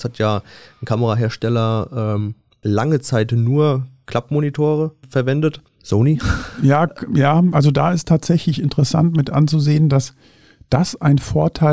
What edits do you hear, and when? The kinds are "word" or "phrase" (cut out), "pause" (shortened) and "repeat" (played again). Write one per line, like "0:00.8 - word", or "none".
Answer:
none